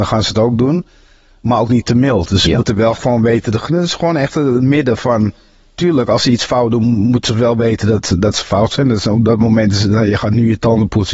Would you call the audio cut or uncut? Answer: uncut